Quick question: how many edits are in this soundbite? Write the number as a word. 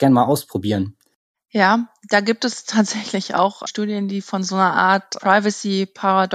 one